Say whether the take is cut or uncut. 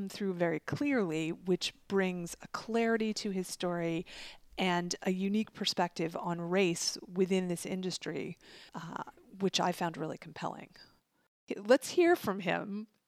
cut